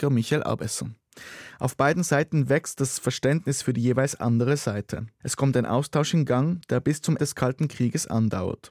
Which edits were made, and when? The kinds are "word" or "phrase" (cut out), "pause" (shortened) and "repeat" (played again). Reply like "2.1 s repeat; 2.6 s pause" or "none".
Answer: 7.2 s word